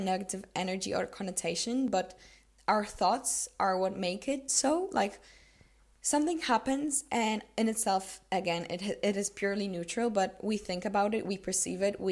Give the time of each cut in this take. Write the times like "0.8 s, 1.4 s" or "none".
none